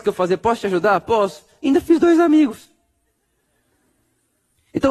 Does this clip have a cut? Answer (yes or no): no